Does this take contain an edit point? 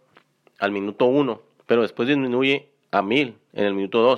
yes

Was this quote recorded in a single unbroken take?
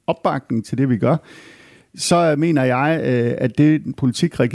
yes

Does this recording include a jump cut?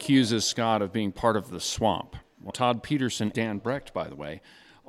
yes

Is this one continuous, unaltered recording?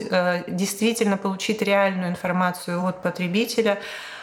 yes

